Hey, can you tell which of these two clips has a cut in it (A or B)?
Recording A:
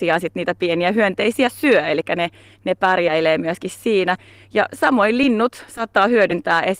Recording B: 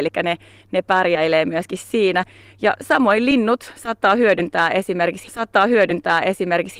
B